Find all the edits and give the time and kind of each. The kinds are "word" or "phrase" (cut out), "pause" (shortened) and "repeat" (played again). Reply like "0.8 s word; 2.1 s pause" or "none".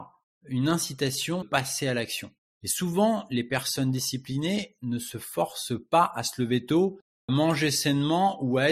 1.4 s word; 2.4 s pause; 7.3 s word